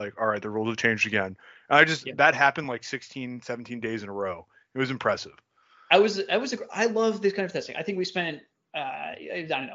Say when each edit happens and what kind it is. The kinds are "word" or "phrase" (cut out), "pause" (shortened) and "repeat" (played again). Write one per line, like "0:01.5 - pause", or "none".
none